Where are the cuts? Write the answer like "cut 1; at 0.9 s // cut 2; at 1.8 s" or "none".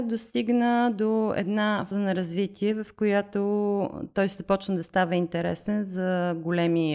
cut 1; at 1.9 s